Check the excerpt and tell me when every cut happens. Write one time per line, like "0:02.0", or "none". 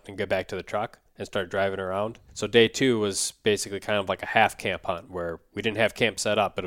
0:01.1
0:02.3